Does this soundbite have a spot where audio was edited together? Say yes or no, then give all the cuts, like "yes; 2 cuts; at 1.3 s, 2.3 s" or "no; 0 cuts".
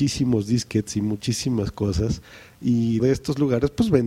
yes; 1 cut; at 3.0 s